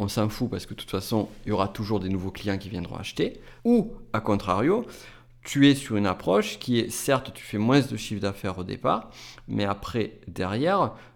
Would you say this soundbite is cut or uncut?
cut